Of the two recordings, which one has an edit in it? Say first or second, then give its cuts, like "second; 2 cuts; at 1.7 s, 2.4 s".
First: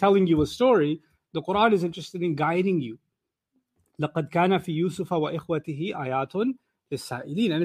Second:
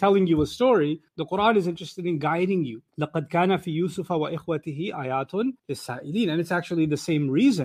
second; 3 cuts; at 1.1 s, 2.9 s, 5.6 s